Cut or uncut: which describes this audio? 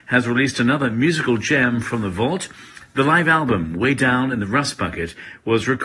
uncut